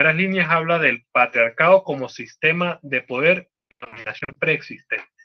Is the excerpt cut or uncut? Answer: uncut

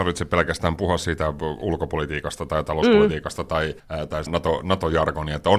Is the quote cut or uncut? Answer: cut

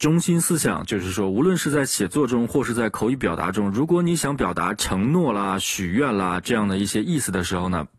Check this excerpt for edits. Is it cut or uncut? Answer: uncut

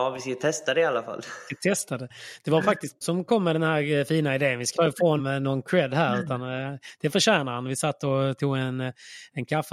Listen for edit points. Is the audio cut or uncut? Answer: cut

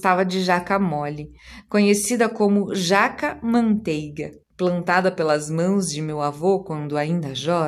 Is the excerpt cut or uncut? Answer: cut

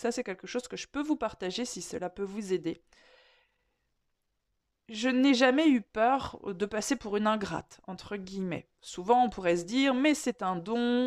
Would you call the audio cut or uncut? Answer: uncut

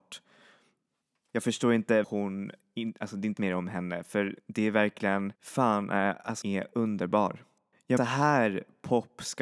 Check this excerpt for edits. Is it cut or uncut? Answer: cut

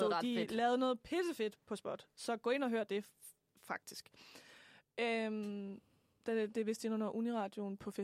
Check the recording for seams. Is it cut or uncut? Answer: uncut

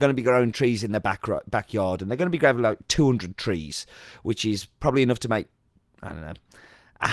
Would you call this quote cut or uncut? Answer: uncut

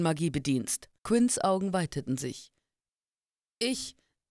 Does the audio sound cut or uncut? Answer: cut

